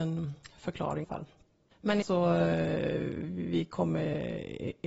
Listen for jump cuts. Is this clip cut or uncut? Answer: cut